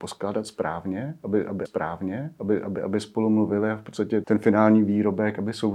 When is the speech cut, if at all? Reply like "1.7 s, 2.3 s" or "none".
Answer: 1.7 s, 4.2 s